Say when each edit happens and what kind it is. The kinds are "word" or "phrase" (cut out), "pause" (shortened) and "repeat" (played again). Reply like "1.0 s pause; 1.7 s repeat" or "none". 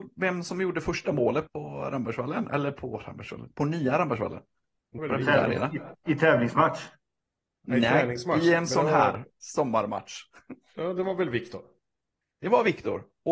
1.5 s word; 5.0 s word